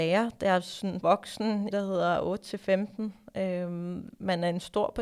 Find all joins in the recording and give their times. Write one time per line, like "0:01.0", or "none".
0:01.0
0:01.7